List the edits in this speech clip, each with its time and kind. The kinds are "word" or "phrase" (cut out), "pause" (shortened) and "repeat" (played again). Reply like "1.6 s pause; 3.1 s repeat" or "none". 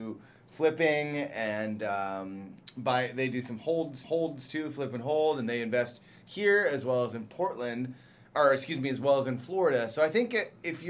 4.0 s repeat